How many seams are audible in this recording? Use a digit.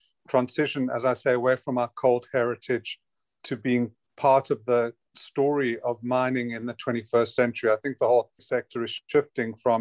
1